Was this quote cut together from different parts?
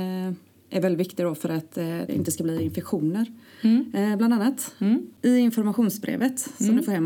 yes; 2 cuts; at 2.1 s, 5.2 s

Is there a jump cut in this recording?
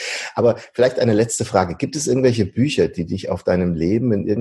no; 0 cuts

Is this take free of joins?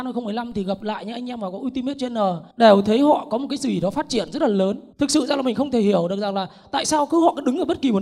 no; 2 cuts; at 2.5 s, 4.9 s

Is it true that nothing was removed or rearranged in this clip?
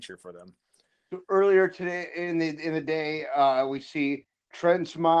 yes; 0 cuts

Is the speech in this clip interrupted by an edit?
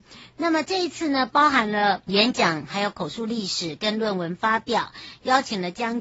yes; 1 cut; at 2.0 s

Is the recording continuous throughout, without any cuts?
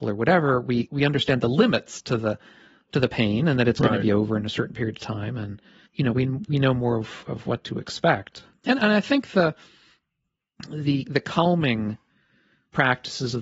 yes; 0 cuts

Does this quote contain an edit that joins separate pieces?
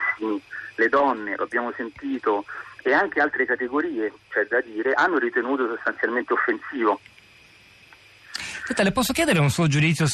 no; 0 cuts

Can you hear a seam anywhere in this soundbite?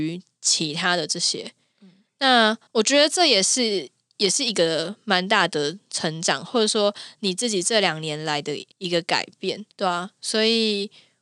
yes; 3 cuts; at 2.7 s, 8.7 s, 9.7 s

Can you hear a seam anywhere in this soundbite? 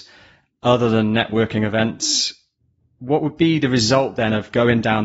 no; 0 cuts

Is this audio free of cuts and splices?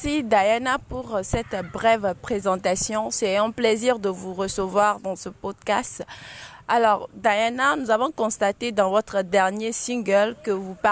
yes; 0 cuts

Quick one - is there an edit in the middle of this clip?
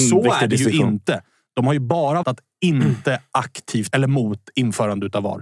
yes; 2 cuts; at 2.2 s, 3.9 s

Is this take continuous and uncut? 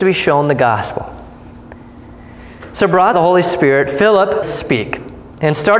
no; 2 cuts; at 3.1 s, 4.4 s

